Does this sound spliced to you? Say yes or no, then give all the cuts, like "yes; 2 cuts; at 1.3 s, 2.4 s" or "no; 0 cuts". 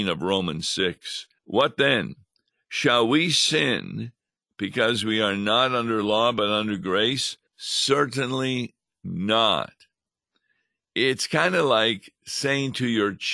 yes; 2 cuts; at 1.4 s, 7.5 s